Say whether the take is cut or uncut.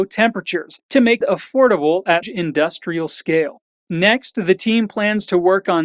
cut